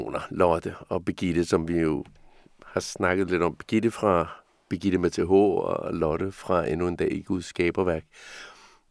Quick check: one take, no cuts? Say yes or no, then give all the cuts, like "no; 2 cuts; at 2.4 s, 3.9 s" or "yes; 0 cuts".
yes; 0 cuts